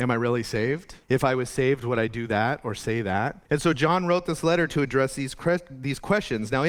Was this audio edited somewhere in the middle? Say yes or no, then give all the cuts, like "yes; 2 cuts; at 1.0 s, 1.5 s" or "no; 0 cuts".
yes; 2 cuts; at 1.0 s, 3.4 s